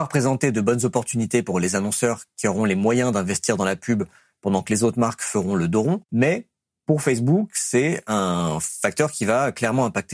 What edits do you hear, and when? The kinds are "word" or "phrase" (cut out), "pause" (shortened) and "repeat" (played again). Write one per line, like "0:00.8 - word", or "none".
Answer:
none